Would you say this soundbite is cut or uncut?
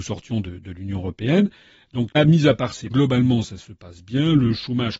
cut